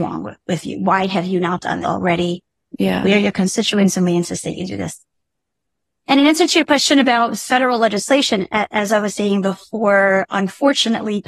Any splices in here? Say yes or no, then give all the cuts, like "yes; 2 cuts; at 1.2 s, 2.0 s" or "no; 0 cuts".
yes; 1 cut; at 1.8 s